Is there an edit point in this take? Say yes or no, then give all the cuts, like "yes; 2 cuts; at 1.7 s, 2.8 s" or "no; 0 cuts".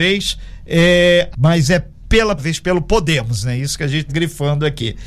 yes; 3 cuts; at 1.3 s, 2.4 s, 4.1 s